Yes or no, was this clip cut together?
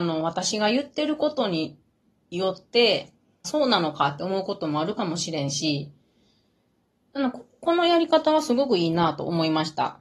yes